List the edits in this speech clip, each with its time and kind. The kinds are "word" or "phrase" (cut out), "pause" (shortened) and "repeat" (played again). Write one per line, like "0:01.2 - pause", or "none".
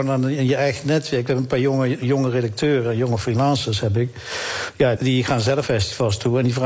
0:05.0 - word
0:05.6 - phrase